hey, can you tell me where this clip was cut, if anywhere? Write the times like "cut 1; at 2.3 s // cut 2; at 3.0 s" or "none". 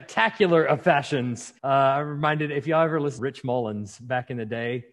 cut 1; at 1.6 s // cut 2; at 3.2 s